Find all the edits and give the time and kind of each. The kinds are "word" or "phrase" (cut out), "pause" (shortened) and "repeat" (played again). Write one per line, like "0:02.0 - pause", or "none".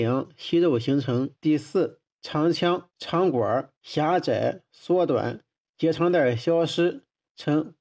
0:01.3 - pause
0:02.1 - pause
0:02.9 - pause
0:03.8 - pause